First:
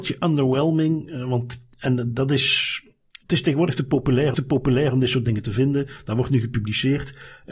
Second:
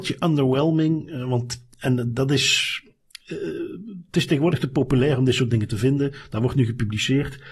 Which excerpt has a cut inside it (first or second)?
first